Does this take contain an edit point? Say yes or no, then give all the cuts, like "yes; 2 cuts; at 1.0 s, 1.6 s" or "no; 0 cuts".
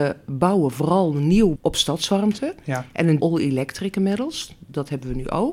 yes; 2 cuts; at 1.6 s, 3.2 s